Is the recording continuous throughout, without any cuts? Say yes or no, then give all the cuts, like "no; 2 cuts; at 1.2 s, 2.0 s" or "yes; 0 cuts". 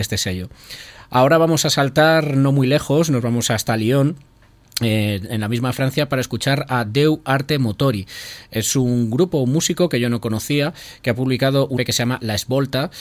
no; 1 cut; at 11.8 s